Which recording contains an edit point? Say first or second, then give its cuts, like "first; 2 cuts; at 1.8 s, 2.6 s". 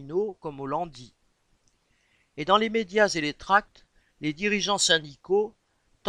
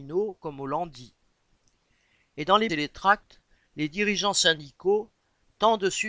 second; 1 cut; at 2.7 s